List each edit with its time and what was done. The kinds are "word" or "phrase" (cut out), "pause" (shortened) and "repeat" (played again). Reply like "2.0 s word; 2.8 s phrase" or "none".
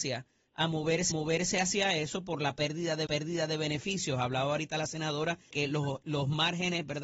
1.1 s repeat; 3.1 s repeat; 5.5 s word